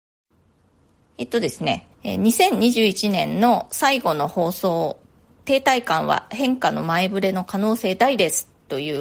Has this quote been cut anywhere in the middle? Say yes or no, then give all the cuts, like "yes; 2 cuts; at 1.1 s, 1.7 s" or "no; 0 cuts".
yes; 2 cuts; at 1.9 s, 5.0 s